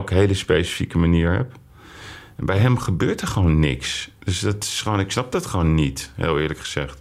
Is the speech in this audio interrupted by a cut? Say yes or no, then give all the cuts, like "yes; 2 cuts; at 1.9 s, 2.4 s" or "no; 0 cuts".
no; 0 cuts